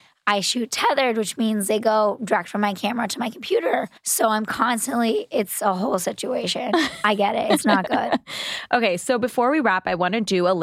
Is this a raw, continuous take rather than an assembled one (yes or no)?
no